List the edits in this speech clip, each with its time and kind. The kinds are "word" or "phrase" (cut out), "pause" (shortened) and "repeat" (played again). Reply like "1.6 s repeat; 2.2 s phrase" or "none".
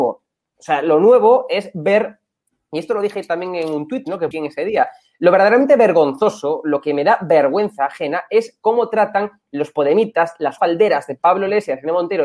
4.3 s word; 10.6 s word